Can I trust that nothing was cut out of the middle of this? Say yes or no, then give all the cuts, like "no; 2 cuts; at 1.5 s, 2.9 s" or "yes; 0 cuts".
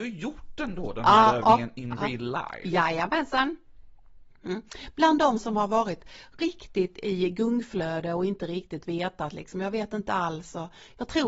yes; 0 cuts